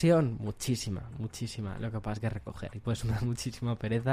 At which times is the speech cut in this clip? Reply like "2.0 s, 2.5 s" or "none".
2.2 s